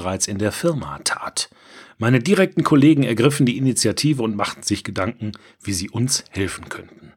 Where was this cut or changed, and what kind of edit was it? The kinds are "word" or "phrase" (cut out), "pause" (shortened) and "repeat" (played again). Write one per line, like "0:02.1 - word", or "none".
none